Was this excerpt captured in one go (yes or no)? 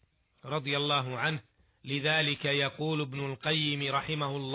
yes